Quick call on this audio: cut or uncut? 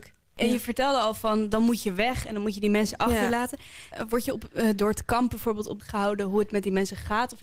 cut